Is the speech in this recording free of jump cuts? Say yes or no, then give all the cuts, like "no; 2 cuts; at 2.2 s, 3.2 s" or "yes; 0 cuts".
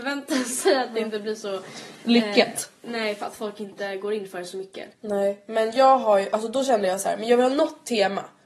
no; 1 cut; at 4.9 s